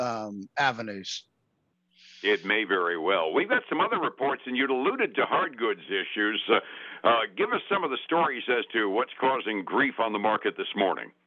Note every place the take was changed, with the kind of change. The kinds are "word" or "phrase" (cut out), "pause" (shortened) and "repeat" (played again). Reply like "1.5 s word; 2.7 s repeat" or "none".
none

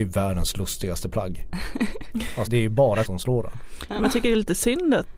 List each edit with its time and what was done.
2.5 s word; 3.0 s word

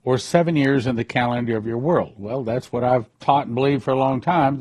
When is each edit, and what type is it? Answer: 3.1 s pause

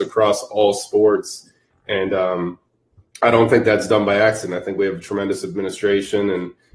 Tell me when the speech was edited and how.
none

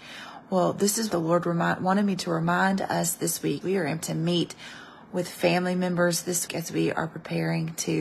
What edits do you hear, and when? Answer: 1.1 s word; 3.6 s word; 4.0 s word; 6.5 s word

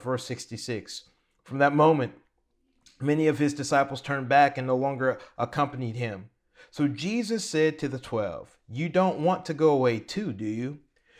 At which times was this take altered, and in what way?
none

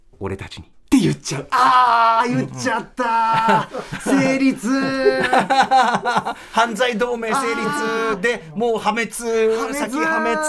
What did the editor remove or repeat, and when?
none

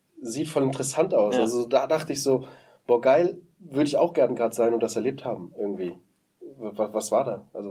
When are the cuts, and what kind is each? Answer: none

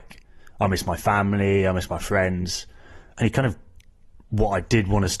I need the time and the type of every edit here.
none

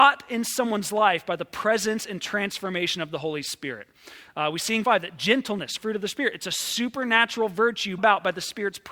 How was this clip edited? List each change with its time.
4.8 s word; 5.8 s phrase; 8.0 s word

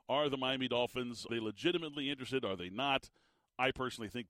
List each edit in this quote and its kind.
1.3 s word

